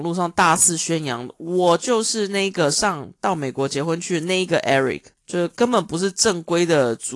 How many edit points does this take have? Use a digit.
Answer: 1